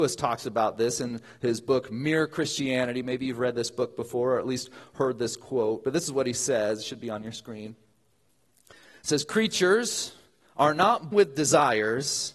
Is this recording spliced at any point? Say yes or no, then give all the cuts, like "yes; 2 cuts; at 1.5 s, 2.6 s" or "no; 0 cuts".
yes; 1 cut; at 11.1 s